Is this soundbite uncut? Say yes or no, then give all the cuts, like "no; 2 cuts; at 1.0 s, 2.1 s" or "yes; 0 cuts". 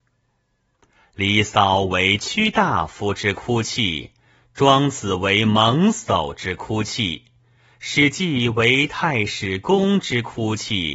yes; 0 cuts